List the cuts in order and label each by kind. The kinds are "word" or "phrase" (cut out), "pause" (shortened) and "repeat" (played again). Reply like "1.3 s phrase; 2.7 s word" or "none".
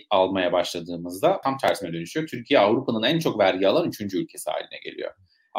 1.4 s phrase